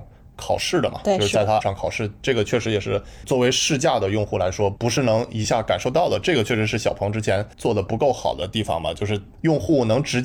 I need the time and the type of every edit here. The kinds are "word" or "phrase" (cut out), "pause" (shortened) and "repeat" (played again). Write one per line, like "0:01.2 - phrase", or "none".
0:01.6 - word